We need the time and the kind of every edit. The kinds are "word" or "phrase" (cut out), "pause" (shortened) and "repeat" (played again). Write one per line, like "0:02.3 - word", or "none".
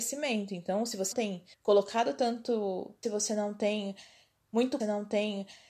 0:01.1 - word
0:01.5 - pause
0:03.0 - phrase
0:04.8 - repeat